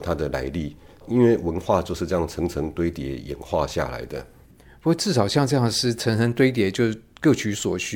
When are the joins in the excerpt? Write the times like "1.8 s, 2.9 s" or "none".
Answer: none